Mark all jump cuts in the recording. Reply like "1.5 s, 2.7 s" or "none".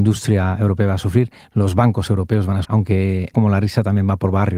2.6 s, 3.3 s